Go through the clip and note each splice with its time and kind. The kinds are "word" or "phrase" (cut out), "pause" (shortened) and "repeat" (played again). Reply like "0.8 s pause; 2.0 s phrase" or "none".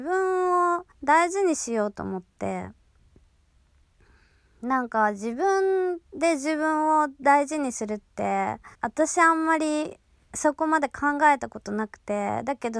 0.9 s pause; 6.1 s pause; 8.7 s pause